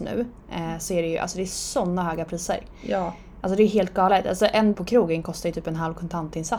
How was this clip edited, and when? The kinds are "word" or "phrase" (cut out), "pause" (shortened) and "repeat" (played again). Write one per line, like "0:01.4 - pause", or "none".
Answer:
0:04.7 - word